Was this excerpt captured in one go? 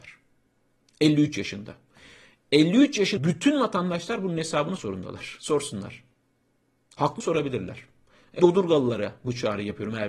no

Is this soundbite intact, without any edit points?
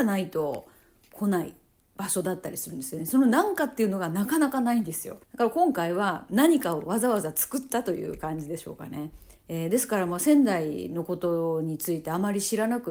no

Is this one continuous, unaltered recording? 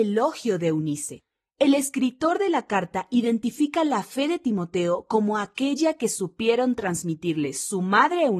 yes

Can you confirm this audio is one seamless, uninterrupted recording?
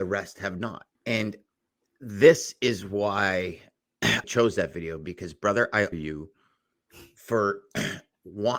no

